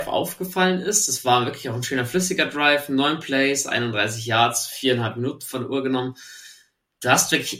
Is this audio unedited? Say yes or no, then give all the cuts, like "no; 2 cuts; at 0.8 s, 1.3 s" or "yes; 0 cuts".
yes; 0 cuts